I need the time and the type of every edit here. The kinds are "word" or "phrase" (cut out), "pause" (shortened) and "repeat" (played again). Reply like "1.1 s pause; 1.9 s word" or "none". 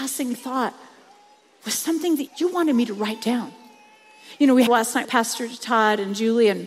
2.3 s word; 4.7 s phrase; 5.0 s word